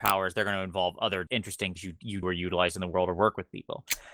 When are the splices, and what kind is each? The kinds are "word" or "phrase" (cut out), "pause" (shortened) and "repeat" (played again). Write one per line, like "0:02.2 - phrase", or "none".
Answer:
0:01.3 - word
0:01.8 - word
0:02.2 - word